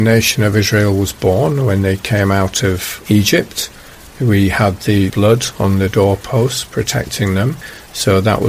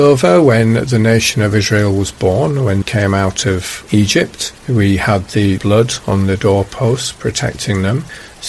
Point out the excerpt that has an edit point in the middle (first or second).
second